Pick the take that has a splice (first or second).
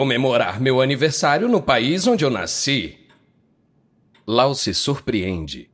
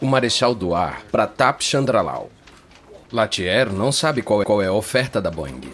second